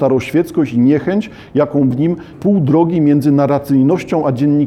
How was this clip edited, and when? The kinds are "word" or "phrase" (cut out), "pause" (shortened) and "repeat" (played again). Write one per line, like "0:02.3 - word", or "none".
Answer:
0:01.9 - word
0:02.3 - phrase